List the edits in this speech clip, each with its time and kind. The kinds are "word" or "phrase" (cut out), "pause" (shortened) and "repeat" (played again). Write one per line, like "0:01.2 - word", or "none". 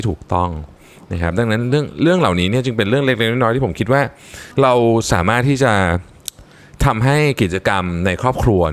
0:04.5 - pause